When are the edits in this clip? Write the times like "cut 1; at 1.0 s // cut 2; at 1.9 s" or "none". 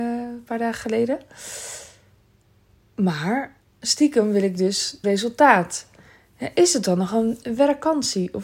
cut 1; at 3.6 s // cut 2; at 5.0 s